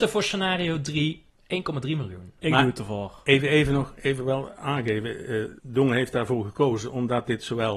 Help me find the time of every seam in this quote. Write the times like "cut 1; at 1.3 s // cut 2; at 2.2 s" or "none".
cut 1; at 1.3 s // cut 2; at 2.4 s // cut 3; at 5.6 s